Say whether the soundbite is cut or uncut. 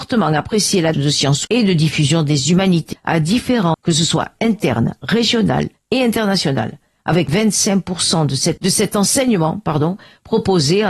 cut